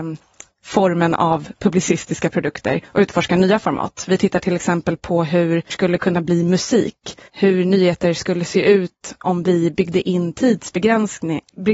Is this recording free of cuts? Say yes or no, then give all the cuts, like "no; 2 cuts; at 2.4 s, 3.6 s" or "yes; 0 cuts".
no; 3 cuts; at 2.8 s, 5.7 s, 7.3 s